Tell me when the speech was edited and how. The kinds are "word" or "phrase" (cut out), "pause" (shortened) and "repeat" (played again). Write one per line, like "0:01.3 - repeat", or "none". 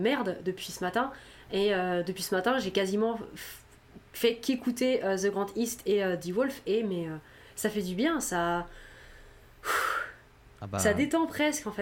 none